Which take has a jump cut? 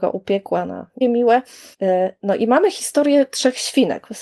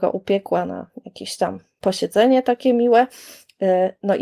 first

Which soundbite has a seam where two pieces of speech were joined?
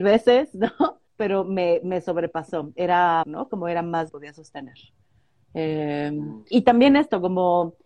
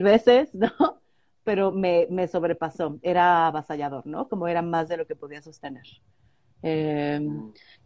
first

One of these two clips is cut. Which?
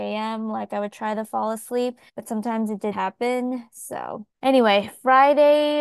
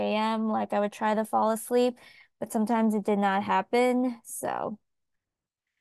first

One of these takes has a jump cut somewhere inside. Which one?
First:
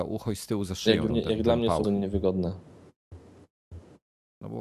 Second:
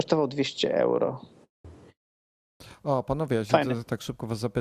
first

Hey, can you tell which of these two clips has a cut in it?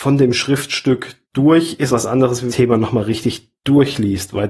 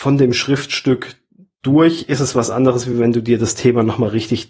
first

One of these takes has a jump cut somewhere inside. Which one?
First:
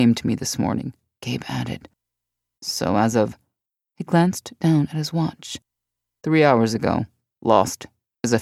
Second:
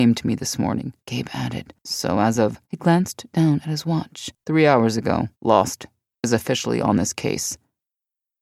second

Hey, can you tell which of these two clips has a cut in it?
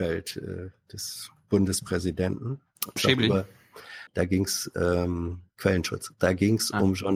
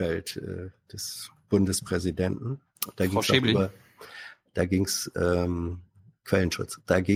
first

